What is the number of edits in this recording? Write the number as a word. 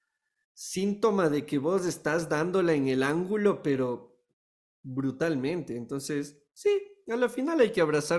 zero